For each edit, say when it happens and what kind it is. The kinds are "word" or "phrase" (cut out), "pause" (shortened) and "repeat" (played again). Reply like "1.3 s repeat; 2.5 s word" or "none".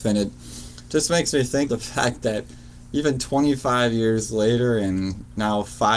1.7 s word